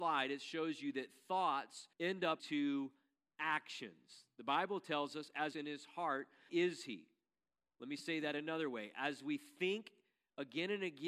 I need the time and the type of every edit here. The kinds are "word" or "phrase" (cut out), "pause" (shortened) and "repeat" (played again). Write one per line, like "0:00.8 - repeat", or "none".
0:01.9 - pause
0:02.4 - word
0:05.5 - phrase
0:06.5 - word